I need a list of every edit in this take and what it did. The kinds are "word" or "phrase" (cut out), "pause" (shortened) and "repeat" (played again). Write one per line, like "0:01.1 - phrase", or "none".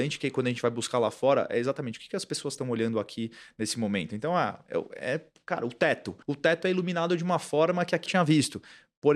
0:06.2 - pause
0:08.1 - phrase